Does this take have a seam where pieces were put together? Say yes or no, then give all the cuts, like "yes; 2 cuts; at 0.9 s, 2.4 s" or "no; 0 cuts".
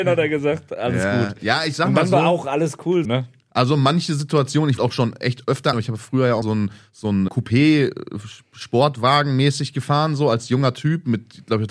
yes; 5 cuts; at 3.0 s, 4.8 s, 5.7 s, 6.4 s, 7.3 s